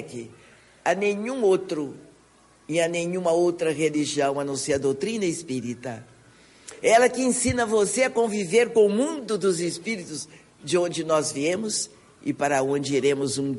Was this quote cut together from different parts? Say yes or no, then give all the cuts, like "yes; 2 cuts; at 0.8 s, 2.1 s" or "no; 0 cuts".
no; 0 cuts